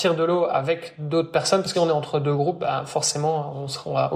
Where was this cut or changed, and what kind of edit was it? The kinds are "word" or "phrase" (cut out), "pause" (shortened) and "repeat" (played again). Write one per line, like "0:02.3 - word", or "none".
0:01.7 - word